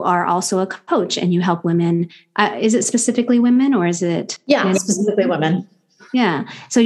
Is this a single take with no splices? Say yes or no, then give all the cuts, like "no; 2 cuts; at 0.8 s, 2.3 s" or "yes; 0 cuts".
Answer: yes; 0 cuts